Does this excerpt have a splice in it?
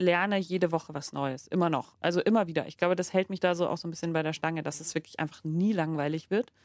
no; 0 cuts

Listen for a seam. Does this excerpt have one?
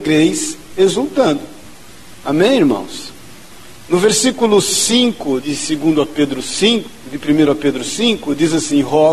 yes; 1 cut; at 5.4 s

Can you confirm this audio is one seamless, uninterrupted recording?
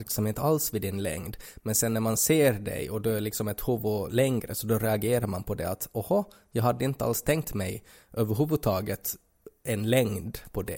yes; 0 cuts

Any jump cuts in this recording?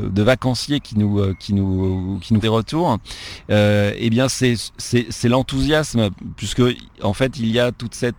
yes; 1 cut; at 2.4 s

